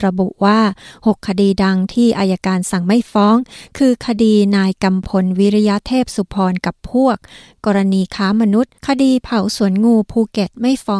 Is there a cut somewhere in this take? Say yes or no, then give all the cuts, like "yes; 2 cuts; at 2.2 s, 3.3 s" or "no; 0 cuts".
yes; 1 cut; at 8.8 s